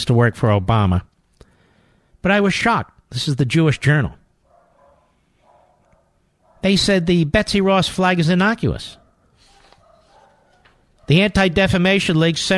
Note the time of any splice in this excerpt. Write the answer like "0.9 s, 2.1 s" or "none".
none